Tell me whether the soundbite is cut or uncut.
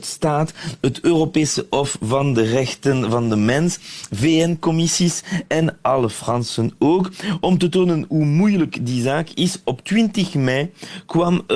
uncut